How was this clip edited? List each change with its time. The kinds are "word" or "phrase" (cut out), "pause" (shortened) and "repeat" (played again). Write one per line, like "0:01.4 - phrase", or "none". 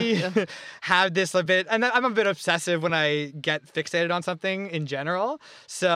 none